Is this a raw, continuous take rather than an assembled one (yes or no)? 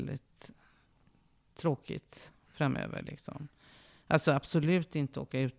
yes